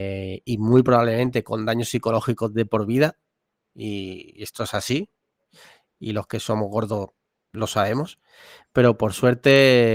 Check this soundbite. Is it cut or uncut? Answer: uncut